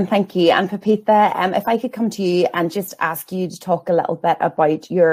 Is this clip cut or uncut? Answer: uncut